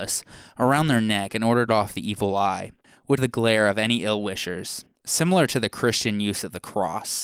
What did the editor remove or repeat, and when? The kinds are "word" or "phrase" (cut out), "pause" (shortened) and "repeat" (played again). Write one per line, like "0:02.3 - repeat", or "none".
0:01.7 - word
0:03.2 - word